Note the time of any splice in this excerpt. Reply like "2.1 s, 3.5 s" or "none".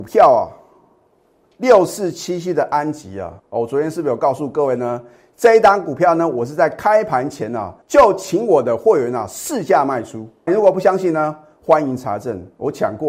3.4 s, 7.8 s, 10.5 s

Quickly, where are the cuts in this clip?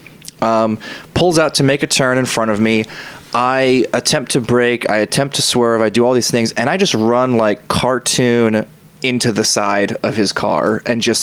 none

